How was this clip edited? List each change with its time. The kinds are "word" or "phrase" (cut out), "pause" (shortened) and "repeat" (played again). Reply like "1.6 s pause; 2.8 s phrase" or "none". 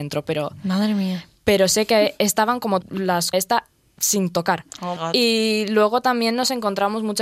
2.8 s word; 3.3 s phrase; 5.0 s word